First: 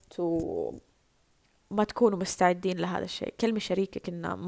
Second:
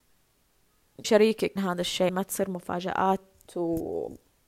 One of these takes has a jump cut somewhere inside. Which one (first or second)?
second